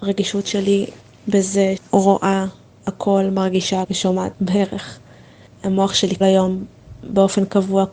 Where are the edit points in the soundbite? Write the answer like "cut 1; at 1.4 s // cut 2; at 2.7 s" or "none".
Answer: cut 1; at 1.8 s // cut 2; at 3.8 s // cut 3; at 4.3 s // cut 4; at 6.2 s